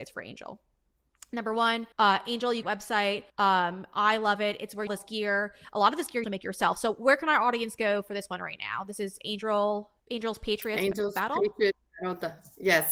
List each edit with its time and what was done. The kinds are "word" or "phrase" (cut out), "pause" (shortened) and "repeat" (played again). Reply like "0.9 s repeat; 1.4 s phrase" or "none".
1.9 s pause; 2.6 s phrase; 3.3 s pause; 4.9 s phrase; 6.2 s word; 10.0 s pause